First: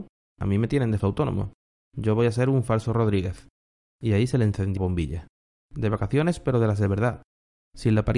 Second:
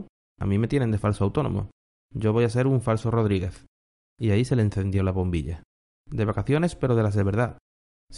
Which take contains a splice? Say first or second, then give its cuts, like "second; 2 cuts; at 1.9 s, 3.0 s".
first; 2 cuts; at 1.0 s, 4.8 s